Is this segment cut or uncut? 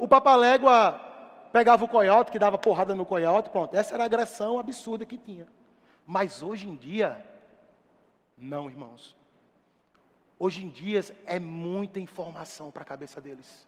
uncut